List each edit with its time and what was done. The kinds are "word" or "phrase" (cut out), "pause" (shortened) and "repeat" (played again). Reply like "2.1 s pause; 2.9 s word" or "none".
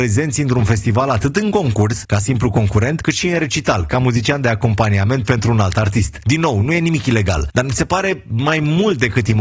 none